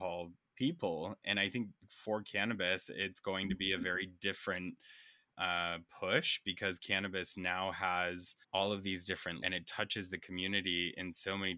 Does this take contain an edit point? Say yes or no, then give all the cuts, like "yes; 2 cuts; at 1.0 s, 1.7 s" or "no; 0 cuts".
yes; 3 cuts; at 5.3 s, 8.4 s, 9.4 s